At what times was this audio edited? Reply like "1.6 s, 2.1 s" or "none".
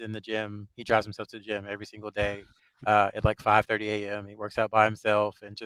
none